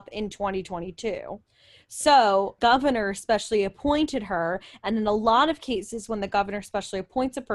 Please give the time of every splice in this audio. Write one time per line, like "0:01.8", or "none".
0:02.6

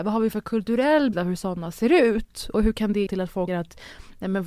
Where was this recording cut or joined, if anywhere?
0:01.1
0:03.1
0:03.5

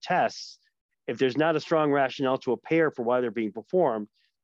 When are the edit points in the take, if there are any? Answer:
none

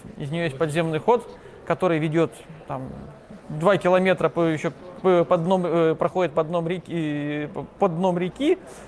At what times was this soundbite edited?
0:03.4

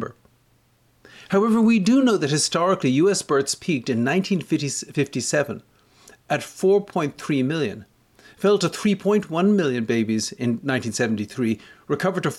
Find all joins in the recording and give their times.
none

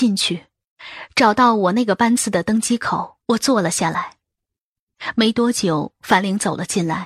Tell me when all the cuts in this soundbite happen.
0:03.2

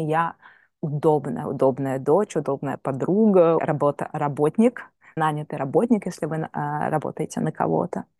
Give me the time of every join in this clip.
0:03.6
0:05.2

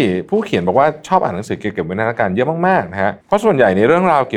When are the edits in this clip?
0:03.2

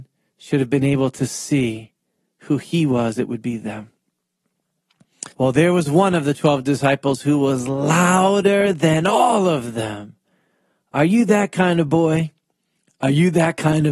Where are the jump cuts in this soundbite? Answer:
0:05.3

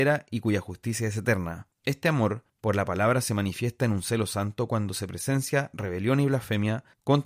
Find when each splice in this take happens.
none

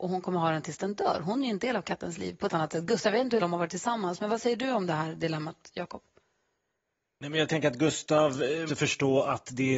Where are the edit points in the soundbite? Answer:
0:02.5
0:03.4
0:08.7

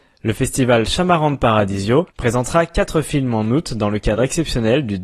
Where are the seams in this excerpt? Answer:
0:02.1

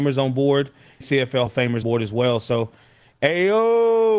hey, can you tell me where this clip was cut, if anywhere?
0:01.0
0:01.5
0:01.8

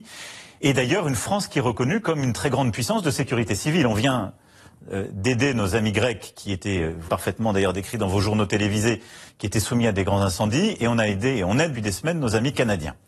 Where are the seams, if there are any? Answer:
0:07.1
0:11.7

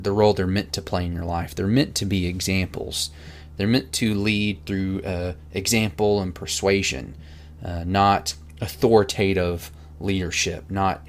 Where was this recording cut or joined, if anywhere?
none

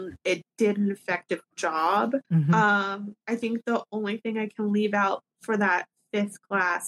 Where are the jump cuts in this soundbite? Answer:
0:02.2
0:03.2

